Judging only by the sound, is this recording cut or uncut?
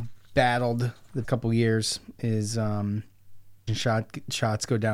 cut